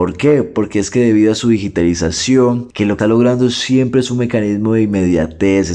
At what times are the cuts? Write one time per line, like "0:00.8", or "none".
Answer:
0:03.0